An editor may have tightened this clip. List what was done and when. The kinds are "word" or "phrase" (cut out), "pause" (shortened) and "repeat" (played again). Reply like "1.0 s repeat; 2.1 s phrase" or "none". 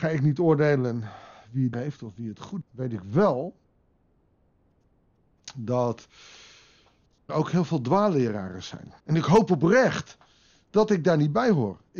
1.7 s phrase; 2.6 s word; 7.3 s word; 9.0 s pause